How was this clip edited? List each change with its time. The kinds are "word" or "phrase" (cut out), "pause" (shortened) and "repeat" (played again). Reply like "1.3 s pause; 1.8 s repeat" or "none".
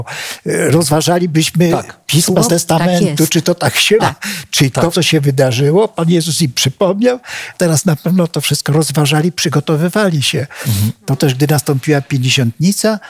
2.5 s word; 4.0 s word; 4.9 s word; 7.5 s word